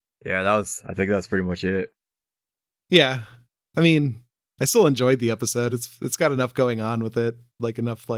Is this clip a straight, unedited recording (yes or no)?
yes